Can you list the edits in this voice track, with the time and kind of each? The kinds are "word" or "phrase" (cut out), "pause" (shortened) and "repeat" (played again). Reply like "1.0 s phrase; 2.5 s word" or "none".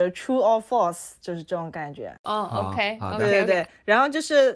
2.2 s pause